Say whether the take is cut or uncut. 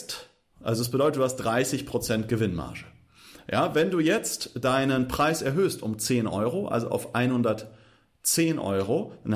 uncut